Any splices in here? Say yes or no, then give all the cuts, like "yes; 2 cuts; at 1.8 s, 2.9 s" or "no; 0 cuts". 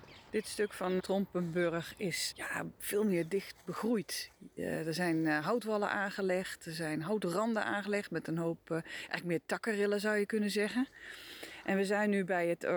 yes; 2 cuts; at 1.0 s, 2.3 s